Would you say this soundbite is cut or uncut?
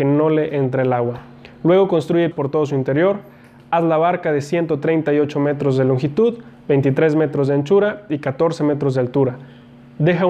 cut